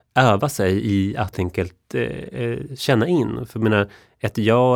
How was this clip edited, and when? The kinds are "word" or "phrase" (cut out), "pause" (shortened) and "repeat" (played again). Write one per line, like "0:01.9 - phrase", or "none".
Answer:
0:01.3 - word